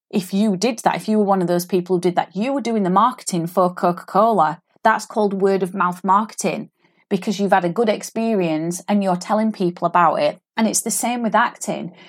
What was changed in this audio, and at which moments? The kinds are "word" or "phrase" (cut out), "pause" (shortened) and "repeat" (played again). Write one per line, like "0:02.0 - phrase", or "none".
none